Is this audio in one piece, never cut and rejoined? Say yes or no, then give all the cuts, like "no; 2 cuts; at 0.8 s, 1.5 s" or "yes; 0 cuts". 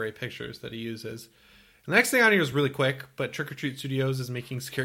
yes; 0 cuts